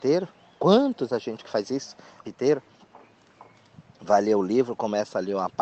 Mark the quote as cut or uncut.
cut